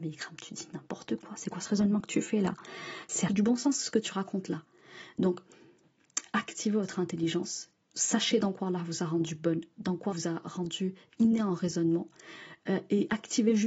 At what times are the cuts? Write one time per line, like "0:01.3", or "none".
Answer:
0:03.3
0:07.8
0:10.1